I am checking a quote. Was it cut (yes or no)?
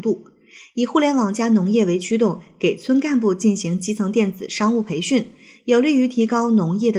no